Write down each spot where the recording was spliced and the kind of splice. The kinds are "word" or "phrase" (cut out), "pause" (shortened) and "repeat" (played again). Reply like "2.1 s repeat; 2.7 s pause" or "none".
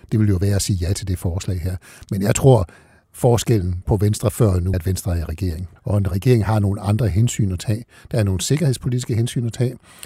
4.7 s word; 5.8 s pause